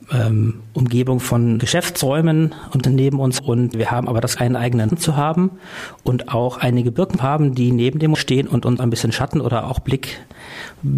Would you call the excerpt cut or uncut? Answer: cut